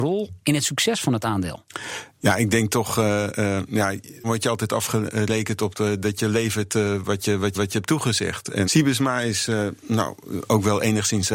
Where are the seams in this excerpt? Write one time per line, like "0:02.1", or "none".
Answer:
0:04.2
0:07.5
0:08.6